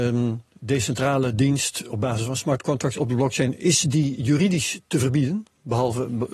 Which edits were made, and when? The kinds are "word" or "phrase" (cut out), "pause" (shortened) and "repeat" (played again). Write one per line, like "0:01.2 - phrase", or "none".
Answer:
none